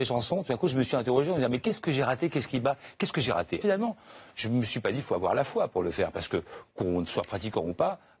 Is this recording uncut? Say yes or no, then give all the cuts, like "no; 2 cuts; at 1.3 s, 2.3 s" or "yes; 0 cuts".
no; 2 cuts; at 3.6 s, 6.7 s